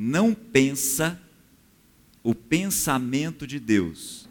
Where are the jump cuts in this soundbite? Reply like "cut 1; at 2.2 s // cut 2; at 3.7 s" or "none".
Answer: none